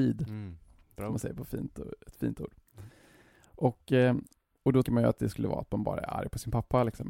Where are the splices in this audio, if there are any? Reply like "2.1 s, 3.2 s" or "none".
4.8 s